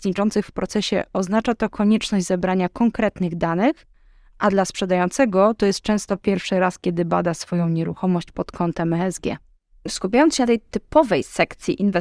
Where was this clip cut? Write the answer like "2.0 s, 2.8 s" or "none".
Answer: none